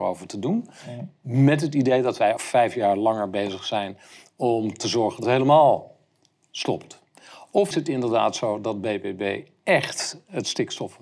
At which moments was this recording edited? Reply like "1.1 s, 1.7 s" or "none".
2.4 s, 5.2 s, 7.7 s